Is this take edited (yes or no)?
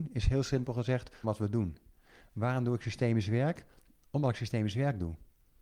yes